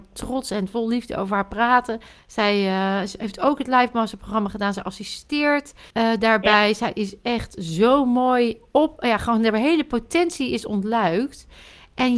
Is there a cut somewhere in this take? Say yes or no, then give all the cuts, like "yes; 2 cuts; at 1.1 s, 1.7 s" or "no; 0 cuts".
yes; 2 cuts; at 2.1 s, 5.9 s